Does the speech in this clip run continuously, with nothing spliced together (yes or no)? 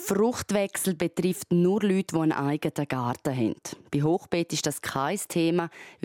yes